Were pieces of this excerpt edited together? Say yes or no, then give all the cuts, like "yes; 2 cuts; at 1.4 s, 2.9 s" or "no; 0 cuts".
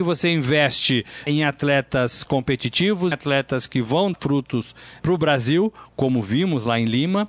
yes; 3 cuts; at 1.3 s, 3.1 s, 4.1 s